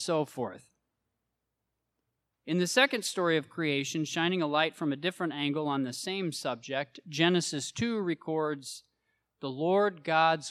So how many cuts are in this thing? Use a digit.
0